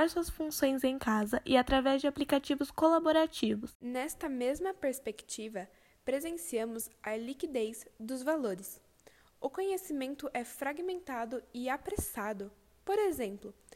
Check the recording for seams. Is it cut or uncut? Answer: uncut